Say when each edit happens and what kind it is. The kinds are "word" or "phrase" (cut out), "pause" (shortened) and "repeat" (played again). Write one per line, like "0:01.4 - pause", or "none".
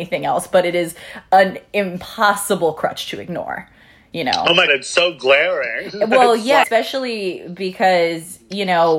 0:04.7 - word
0:06.6 - word